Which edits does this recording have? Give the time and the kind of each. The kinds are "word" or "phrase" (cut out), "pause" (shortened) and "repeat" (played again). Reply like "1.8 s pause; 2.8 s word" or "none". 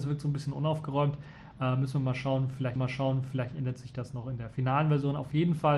2.8 s repeat